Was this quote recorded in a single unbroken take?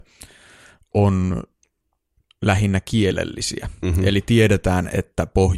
yes; 0 cuts

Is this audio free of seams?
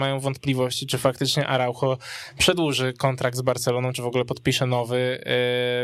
yes; 0 cuts

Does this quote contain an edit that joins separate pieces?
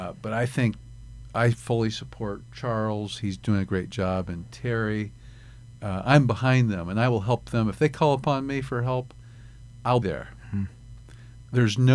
yes; 1 cut; at 10.0 s

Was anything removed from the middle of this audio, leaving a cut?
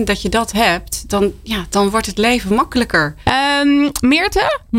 no; 0 cuts

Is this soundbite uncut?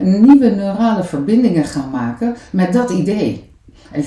yes; 0 cuts

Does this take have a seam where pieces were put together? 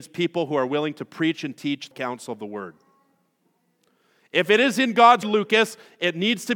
yes; 2 cuts; at 1.9 s, 5.2 s

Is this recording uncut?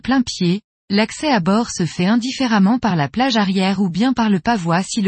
yes; 0 cuts

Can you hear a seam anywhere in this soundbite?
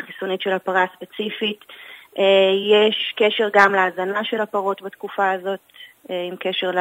no; 0 cuts

